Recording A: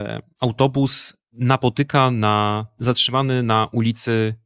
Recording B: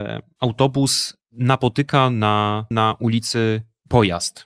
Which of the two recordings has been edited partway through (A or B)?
B